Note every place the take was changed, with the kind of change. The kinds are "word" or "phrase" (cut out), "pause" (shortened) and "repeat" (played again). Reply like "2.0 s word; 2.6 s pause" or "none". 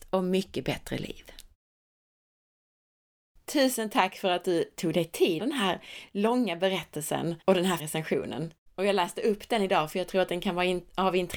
5.4 s phrase; 7.4 s pause; 7.8 s word; 8.7 s pause